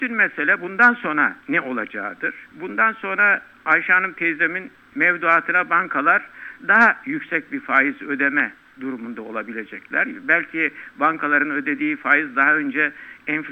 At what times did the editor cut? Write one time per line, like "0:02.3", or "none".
0:01.4
0:06.6